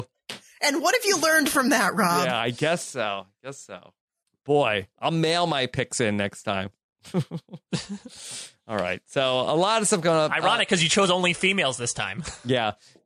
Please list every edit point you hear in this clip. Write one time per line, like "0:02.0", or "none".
0:04.2